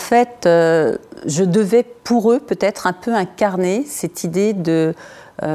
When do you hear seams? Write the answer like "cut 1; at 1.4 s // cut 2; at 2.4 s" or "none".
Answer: cut 1; at 2.0 s